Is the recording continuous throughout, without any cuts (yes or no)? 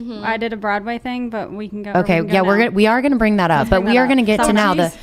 yes